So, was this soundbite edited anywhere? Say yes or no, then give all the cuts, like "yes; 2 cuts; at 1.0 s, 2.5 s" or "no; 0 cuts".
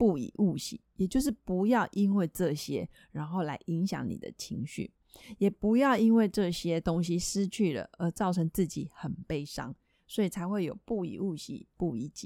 no; 0 cuts